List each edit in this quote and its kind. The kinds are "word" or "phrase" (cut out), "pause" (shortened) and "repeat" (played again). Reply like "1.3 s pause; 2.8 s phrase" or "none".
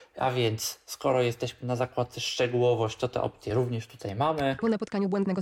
none